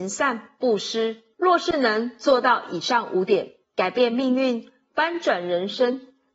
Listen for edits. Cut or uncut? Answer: cut